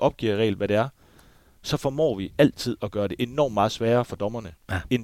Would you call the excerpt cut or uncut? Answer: uncut